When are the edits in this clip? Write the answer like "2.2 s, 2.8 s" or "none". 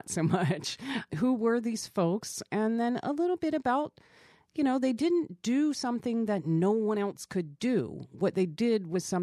none